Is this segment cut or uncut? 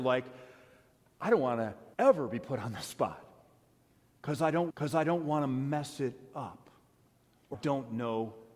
cut